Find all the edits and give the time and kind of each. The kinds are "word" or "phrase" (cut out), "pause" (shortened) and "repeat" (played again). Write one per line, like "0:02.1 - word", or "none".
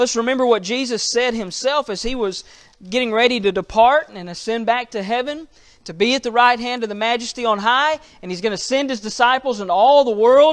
none